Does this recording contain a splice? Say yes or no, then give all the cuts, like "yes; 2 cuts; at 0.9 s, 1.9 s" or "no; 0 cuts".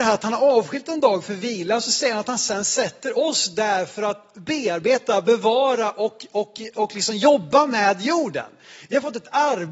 no; 0 cuts